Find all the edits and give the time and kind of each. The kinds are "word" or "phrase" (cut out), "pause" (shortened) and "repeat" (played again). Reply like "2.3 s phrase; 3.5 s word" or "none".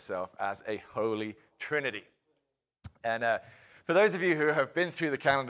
none